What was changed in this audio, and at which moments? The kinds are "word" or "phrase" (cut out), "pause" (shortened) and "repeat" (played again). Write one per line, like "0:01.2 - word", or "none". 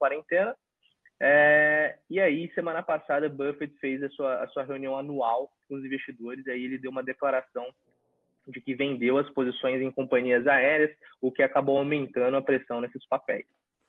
none